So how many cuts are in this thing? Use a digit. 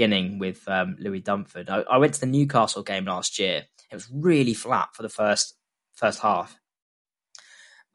0